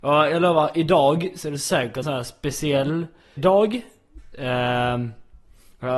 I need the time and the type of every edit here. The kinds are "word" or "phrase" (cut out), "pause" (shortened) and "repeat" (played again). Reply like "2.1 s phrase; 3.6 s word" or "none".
2.0 s word; 3.4 s word